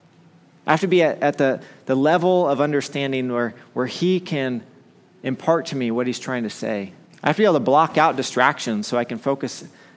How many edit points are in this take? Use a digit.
1